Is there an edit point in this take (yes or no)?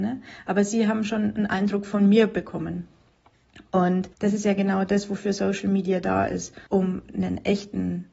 yes